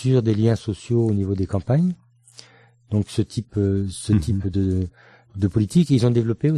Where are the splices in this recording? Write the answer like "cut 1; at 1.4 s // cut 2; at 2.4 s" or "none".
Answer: none